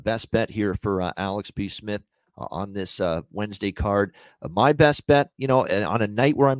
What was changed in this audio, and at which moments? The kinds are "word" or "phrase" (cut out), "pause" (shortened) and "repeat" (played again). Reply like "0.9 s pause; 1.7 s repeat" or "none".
none